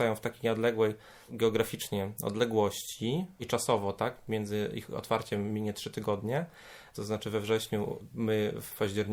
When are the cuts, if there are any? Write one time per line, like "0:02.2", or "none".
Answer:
none